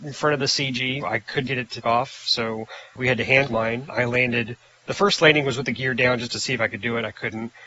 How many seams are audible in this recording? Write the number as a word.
six